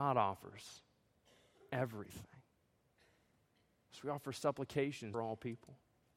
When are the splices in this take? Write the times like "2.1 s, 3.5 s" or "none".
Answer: 5.1 s

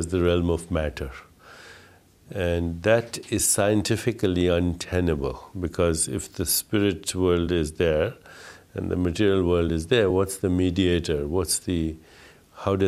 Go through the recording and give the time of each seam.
none

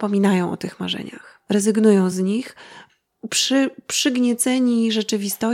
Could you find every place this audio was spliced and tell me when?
none

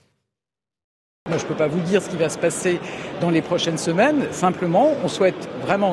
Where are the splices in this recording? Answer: none

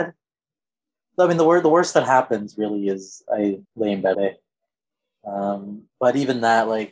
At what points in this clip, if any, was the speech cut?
3.6 s, 4.1 s, 5.9 s

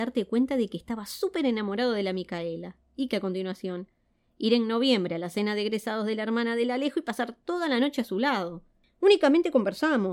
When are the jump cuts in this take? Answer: 3.1 s

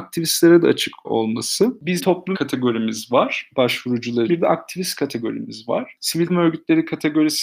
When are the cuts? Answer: 1.0 s, 2.0 s, 2.3 s, 4.3 s, 6.3 s

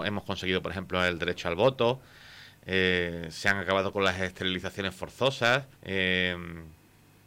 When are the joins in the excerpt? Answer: 5.7 s

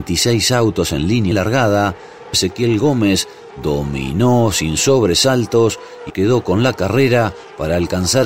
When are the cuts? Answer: 1.3 s, 2.3 s, 6.1 s

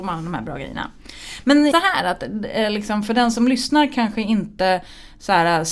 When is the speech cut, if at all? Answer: 1.7 s

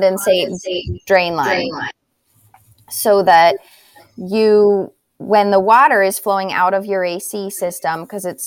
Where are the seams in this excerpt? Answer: none

